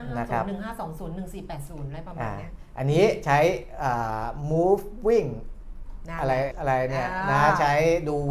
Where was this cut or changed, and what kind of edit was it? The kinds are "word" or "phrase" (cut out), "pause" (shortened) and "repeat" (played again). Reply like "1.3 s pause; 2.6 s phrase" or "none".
6.5 s word